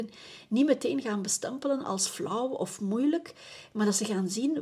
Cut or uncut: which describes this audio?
uncut